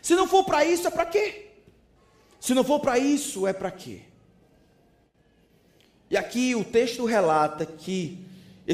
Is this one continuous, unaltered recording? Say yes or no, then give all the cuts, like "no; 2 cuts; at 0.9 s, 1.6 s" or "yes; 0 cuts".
no; 1 cut; at 2.0 s